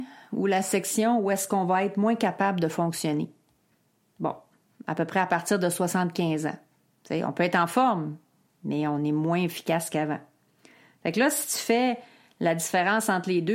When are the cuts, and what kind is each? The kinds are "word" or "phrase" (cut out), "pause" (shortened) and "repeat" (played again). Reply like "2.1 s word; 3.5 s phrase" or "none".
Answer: none